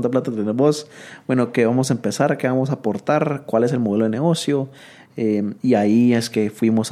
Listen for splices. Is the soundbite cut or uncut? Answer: uncut